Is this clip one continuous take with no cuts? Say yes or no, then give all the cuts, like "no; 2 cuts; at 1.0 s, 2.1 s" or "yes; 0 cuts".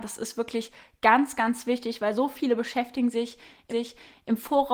no; 1 cut; at 3.7 s